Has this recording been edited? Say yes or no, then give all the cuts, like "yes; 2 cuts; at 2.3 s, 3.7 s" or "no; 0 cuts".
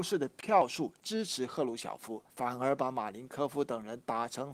yes; 1 cut; at 2.3 s